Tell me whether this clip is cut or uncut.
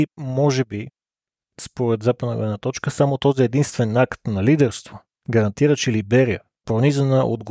cut